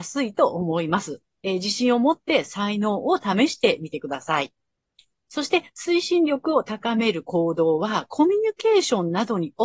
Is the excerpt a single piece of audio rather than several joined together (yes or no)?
yes